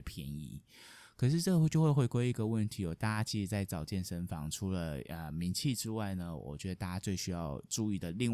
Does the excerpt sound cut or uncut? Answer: uncut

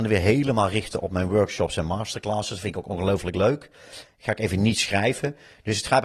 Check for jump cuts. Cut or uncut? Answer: uncut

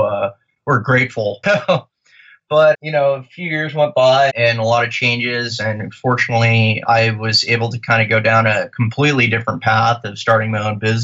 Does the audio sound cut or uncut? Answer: cut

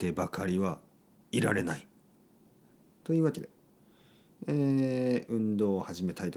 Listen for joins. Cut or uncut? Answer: uncut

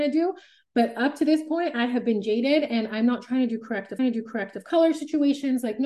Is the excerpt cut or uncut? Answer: cut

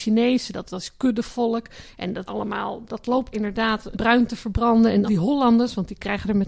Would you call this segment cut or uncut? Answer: cut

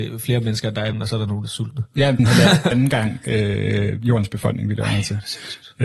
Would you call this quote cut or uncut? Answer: cut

